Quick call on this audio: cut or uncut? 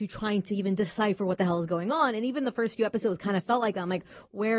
uncut